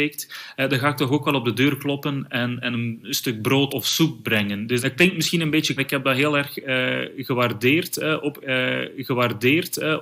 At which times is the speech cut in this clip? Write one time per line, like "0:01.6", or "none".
0:02.6
0:03.7
0:04.8
0:05.8
0:08.4